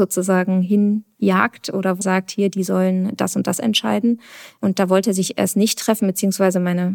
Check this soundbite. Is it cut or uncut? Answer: cut